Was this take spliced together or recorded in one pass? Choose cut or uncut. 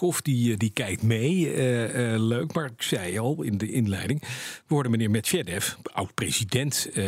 cut